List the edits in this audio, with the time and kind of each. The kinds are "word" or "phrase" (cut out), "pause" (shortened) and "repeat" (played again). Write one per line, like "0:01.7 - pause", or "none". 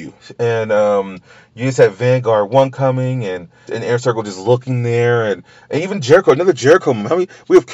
0:03.7 - phrase